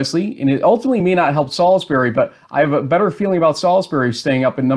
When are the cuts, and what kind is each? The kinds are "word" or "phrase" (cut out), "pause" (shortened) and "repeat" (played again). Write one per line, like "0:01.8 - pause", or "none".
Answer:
none